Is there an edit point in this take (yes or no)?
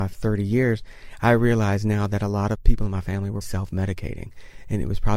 yes